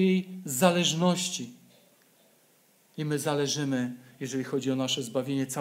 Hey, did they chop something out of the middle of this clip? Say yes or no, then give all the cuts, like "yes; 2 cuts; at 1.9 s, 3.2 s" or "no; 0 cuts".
no; 0 cuts